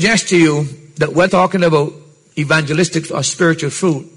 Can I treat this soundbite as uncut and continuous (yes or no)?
no